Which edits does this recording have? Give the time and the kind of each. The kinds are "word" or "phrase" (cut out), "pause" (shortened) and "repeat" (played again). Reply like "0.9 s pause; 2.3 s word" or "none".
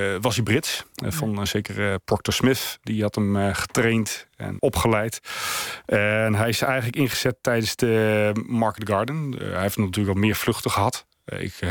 0.9 s pause; 4.6 s word